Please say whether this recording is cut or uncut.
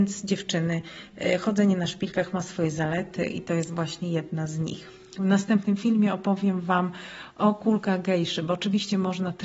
uncut